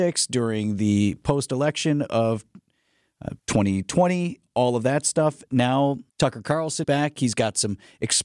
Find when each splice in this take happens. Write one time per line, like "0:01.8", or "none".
0:03.4
0:06.1
0:06.8